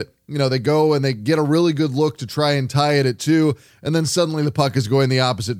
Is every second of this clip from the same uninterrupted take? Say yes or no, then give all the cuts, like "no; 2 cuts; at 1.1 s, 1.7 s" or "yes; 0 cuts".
yes; 0 cuts